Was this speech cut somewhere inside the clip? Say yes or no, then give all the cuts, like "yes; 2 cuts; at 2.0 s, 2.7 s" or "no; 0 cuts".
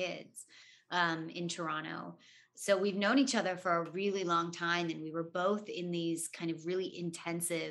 no; 0 cuts